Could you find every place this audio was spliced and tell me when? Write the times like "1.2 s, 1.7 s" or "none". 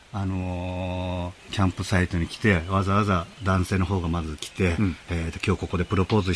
1.4 s